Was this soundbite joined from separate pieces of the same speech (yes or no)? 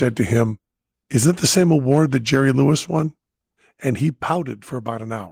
no